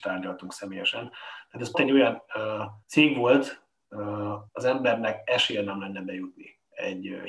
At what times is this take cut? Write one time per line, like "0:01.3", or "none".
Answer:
0:01.7
0:02.8
0:04.5